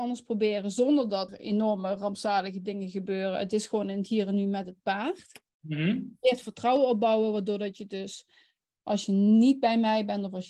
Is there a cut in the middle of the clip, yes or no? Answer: yes